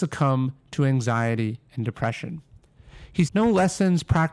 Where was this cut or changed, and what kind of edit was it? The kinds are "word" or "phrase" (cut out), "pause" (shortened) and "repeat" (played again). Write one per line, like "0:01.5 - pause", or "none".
0:03.3 - word